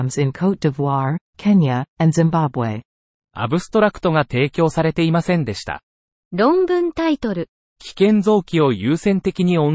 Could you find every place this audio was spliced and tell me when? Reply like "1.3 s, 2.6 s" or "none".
5.9 s